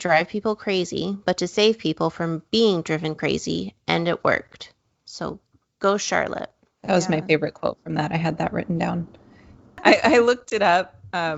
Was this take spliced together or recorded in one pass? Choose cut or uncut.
uncut